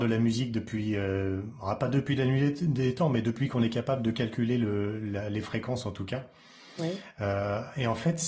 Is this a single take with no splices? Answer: yes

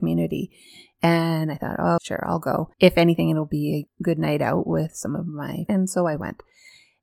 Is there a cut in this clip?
yes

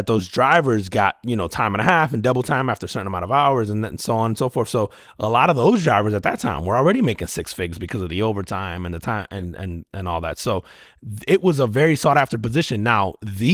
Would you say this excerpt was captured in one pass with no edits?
yes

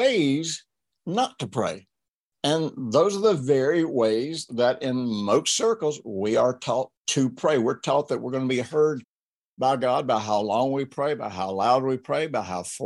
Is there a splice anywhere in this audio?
yes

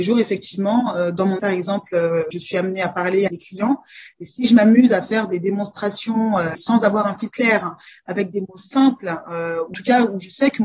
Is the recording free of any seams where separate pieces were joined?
no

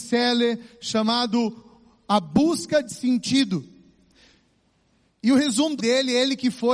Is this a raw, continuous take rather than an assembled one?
no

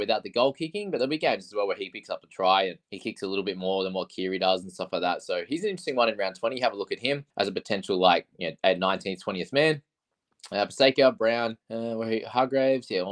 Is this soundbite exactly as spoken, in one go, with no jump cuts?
no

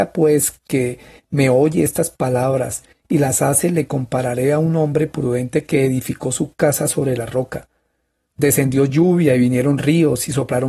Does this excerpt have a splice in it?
no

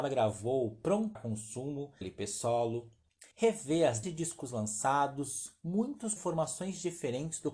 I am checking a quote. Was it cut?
yes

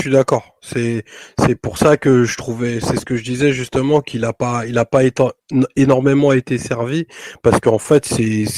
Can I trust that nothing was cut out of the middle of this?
yes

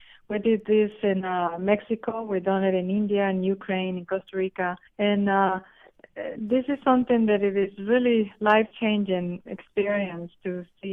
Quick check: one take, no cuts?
no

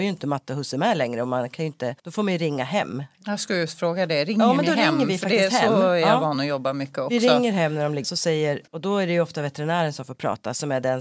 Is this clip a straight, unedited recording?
no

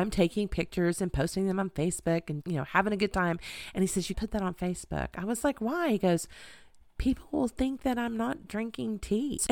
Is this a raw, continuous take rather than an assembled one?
no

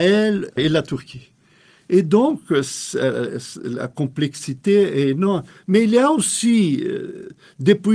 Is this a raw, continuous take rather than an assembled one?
yes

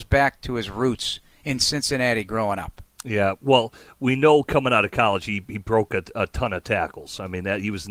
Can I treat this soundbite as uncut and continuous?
yes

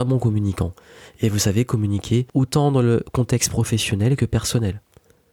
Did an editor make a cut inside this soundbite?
yes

